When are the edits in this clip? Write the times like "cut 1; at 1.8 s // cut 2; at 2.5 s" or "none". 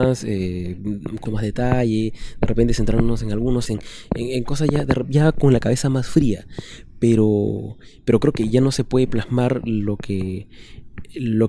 cut 1; at 1.3 s // cut 2; at 3.7 s